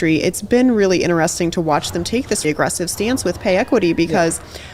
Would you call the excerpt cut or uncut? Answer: cut